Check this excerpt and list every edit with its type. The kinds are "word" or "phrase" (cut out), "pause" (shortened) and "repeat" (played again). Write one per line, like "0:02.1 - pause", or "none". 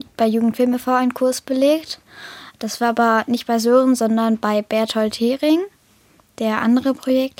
none